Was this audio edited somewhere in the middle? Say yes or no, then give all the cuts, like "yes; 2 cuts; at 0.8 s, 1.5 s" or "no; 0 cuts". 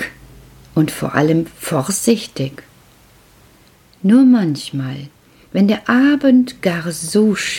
no; 0 cuts